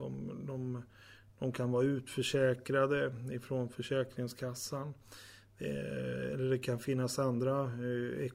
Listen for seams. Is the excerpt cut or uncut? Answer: uncut